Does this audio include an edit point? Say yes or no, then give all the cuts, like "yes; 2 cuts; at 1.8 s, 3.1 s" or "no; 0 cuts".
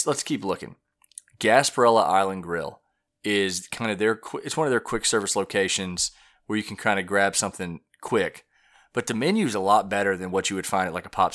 no; 0 cuts